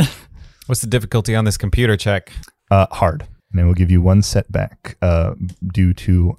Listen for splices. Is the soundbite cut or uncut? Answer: cut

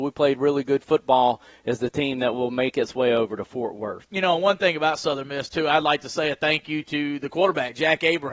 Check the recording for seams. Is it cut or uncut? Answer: uncut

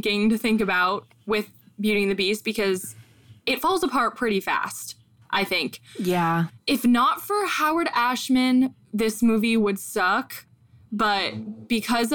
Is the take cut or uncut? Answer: uncut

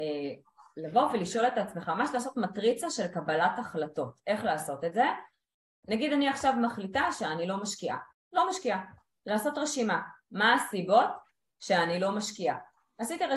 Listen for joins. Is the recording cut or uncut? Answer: cut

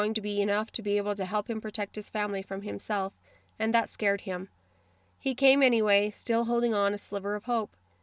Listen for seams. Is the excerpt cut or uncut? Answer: uncut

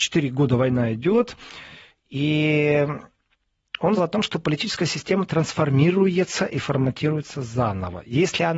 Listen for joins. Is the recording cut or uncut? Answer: cut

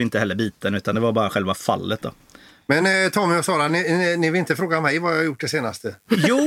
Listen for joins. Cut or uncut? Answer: uncut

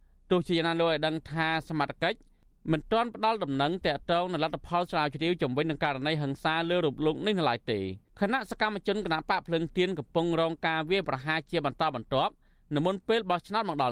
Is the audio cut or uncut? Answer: uncut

